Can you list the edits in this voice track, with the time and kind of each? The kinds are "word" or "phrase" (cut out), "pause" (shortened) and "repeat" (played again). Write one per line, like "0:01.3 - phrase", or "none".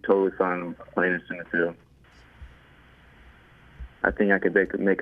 0:04.0 - pause